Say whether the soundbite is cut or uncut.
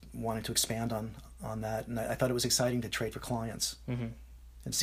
uncut